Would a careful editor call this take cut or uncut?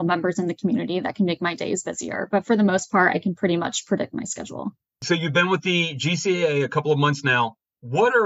uncut